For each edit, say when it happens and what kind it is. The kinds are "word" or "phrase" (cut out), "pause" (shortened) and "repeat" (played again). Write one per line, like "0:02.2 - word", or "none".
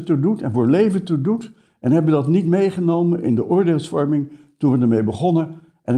none